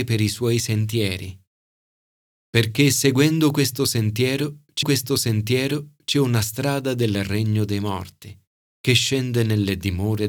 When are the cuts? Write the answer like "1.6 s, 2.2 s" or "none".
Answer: 4.8 s